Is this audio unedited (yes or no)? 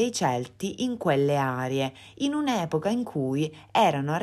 yes